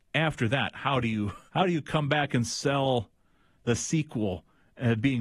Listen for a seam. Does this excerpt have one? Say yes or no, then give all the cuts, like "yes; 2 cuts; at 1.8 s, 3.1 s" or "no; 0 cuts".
yes; 1 cut; at 1.5 s